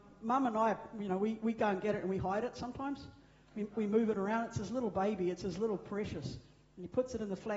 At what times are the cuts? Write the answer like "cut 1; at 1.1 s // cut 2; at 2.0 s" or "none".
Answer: none